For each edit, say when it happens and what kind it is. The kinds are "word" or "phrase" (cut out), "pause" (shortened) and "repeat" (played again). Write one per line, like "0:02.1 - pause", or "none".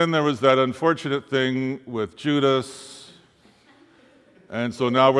none